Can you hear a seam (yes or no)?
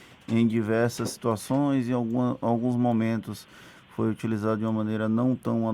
no